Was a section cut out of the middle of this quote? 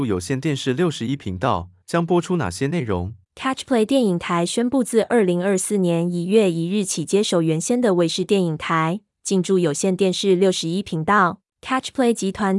yes; 3 cuts; at 1.8 s, 3.2 s, 11.5 s

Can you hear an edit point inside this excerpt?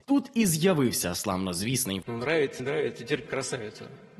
yes; 3 cuts; at 2.0 s, 2.6 s, 3.3 s

